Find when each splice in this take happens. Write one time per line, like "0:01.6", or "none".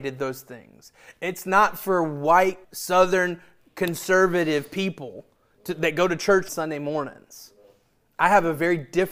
0:02.6
0:06.5